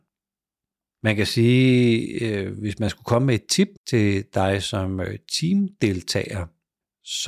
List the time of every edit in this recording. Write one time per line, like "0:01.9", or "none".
0:03.8